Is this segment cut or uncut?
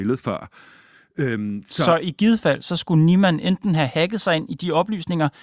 uncut